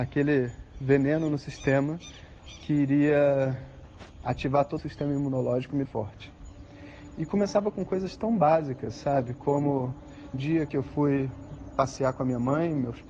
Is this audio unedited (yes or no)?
no